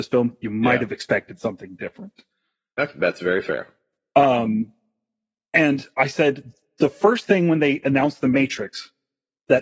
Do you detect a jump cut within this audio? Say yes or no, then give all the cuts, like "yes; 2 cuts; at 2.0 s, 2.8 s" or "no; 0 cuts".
no; 0 cuts